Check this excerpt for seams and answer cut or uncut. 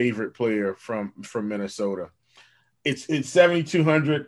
uncut